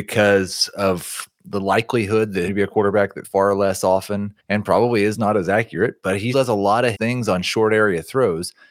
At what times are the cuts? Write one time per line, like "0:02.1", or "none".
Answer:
0:02.5
0:03.2
0:04.4
0:06.3
0:06.9